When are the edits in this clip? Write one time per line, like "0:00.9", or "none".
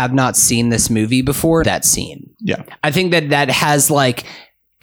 0:01.6